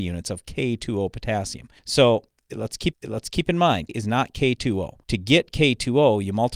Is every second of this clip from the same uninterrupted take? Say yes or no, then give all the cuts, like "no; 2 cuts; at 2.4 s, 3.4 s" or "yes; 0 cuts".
no; 4 cuts; at 1.8 s, 2.9 s, 3.9 s, 5.0 s